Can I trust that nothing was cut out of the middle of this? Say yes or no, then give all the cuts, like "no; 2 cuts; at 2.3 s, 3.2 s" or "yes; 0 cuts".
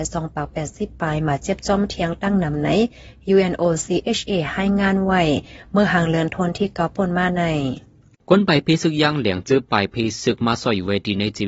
yes; 0 cuts